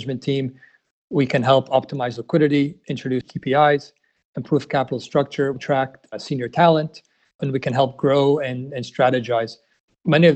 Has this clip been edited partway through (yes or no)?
no